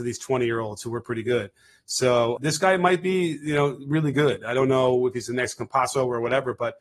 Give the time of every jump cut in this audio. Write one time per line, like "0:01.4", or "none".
0:02.4